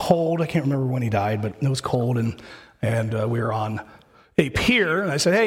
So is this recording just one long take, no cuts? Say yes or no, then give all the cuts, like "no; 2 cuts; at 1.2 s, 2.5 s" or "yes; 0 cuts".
yes; 0 cuts